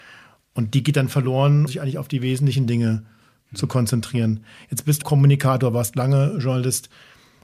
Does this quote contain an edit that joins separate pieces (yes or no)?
yes